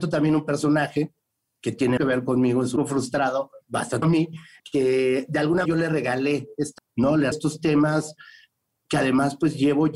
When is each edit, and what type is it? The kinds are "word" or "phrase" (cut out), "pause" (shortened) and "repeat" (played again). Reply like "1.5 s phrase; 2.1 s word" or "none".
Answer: 2.0 s word; 2.8 s word; 4.0 s word; 4.6 s word; 5.6 s word; 6.8 s word; 7.3 s word